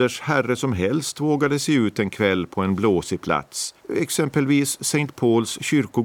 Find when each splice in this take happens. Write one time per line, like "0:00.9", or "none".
0:03.8